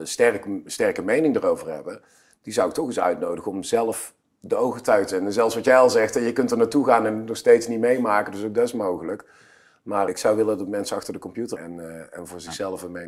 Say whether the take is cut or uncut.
cut